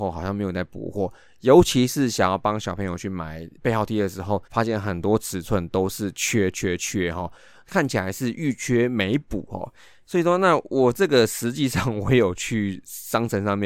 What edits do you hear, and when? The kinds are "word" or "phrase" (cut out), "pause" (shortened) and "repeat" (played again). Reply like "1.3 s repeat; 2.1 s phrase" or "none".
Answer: 3.6 s pause; 4.5 s pause